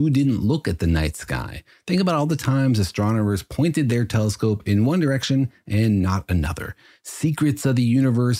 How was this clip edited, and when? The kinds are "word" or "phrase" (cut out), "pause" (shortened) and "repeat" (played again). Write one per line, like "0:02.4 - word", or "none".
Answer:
none